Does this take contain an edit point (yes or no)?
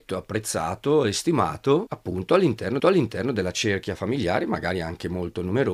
yes